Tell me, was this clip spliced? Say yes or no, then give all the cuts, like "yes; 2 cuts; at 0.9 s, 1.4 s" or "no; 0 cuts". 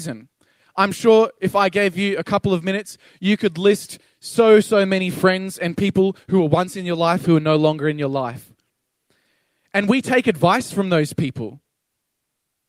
no; 0 cuts